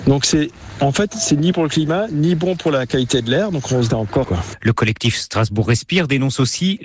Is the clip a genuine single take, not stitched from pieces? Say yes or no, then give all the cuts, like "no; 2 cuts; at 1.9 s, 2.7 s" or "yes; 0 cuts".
no; 3 cuts; at 1.5 s, 3.9 s, 4.2 s